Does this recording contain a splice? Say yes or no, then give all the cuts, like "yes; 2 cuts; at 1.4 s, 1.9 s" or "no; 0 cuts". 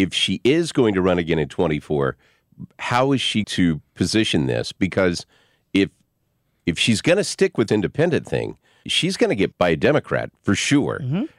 yes; 4 cuts; at 3.4 s, 7.7 s, 8.8 s, 9.5 s